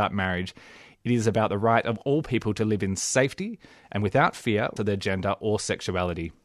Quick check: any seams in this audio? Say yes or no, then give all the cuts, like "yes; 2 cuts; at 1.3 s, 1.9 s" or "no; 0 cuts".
yes; 1 cut; at 4.8 s